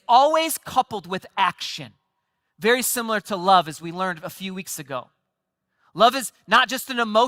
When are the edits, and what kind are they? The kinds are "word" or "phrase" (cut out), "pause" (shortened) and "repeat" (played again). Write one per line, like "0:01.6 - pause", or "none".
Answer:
none